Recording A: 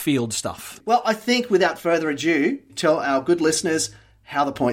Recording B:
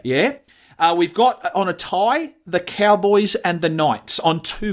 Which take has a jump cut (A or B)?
A